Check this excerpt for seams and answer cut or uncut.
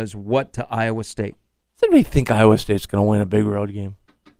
uncut